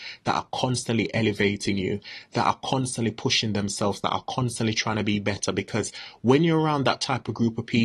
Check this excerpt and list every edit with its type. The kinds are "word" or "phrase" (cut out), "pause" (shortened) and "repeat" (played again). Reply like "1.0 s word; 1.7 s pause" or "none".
none